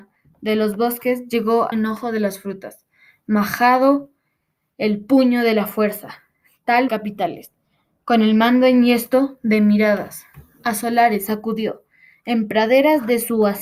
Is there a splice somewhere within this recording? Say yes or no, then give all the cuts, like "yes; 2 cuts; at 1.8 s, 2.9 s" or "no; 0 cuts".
yes; 2 cuts; at 1.7 s, 6.9 s